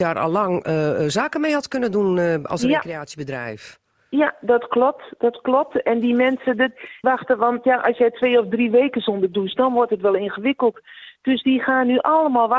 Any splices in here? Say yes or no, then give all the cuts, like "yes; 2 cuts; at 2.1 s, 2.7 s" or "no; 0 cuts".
yes; 1 cut; at 7.0 s